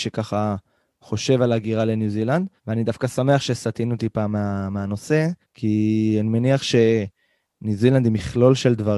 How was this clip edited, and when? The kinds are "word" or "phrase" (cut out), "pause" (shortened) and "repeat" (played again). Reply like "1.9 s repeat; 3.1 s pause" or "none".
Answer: 2.6 s pause; 5.4 s pause